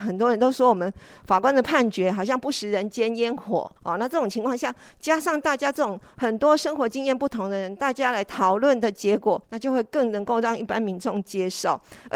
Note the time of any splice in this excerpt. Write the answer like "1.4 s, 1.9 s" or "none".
3.8 s, 9.4 s